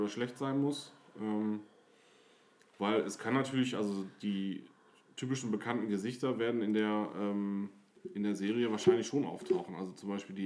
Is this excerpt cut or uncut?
uncut